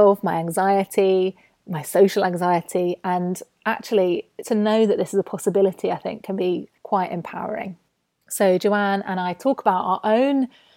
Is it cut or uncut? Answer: cut